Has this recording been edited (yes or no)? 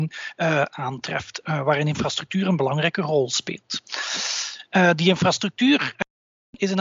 no